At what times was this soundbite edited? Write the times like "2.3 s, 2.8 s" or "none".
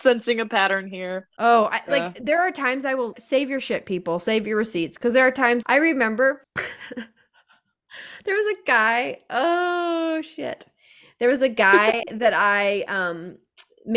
3.1 s, 5.6 s